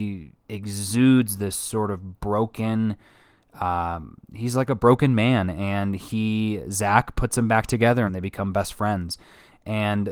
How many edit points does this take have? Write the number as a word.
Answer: two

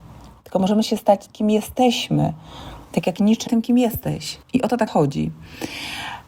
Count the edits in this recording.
four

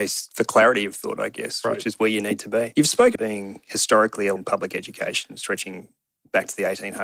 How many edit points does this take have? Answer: two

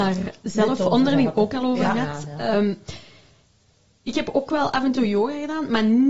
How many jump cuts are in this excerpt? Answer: zero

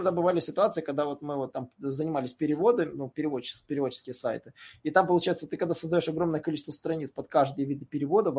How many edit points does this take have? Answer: zero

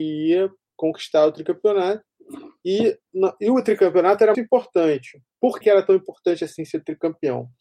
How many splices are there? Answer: two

